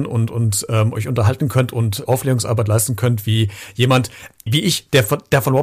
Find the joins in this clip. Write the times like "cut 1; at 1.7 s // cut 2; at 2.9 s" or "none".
cut 1; at 2.0 s // cut 2; at 4.5 s